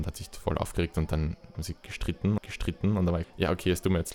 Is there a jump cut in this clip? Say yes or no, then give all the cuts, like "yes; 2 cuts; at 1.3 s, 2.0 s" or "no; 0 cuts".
yes; 3 cuts; at 1.5 s, 2.4 s, 3.2 s